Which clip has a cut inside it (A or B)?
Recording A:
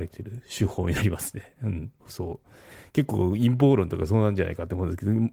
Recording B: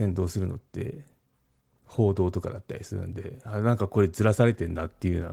A